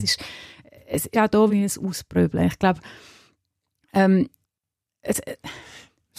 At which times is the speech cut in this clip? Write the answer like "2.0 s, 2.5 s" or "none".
1.1 s, 1.5 s, 4.4 s